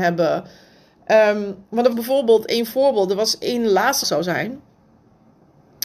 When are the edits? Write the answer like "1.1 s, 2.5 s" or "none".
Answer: 1.9 s, 4.0 s

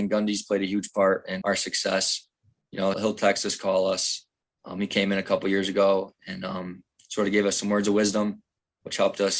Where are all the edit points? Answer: 1.4 s, 2.9 s

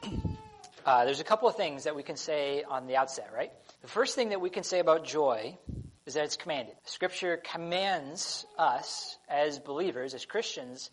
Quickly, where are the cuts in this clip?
3.8 s, 6.0 s, 6.8 s

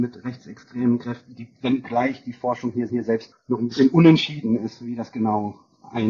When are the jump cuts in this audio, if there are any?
2.9 s, 3.3 s

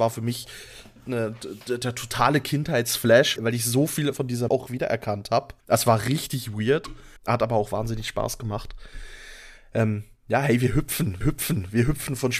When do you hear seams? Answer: 3.4 s, 4.5 s, 5.6 s, 7.2 s, 11.2 s

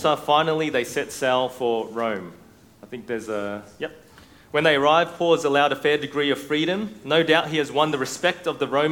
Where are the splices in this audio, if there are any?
none

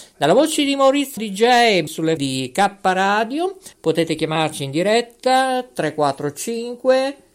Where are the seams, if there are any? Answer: 1.2 s, 1.9 s, 2.2 s, 3.7 s

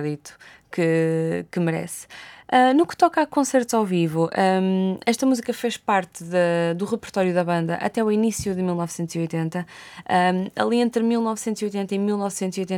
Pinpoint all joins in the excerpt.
none

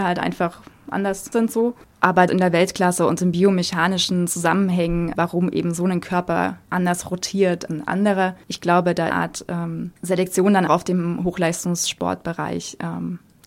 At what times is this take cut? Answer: 1.3 s, 2.3 s, 5.1 s, 6.6 s, 7.7 s, 9.1 s, 10.0 s, 10.7 s

